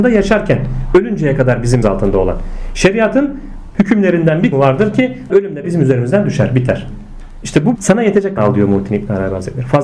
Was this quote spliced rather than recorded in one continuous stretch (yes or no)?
yes